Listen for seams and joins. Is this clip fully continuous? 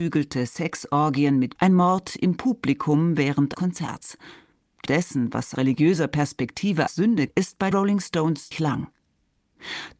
no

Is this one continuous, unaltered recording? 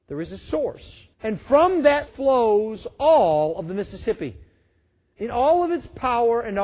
no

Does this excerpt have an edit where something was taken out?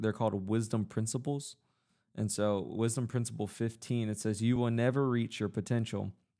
no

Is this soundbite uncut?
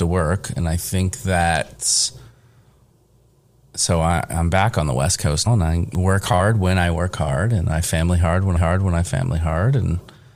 no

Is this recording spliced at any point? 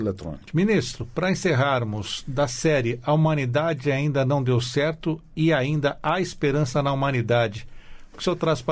no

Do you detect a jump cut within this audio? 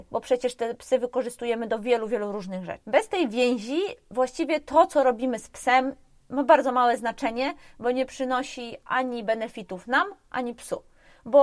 no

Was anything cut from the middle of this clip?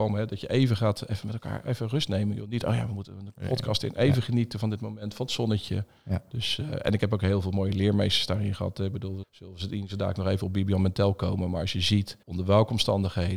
yes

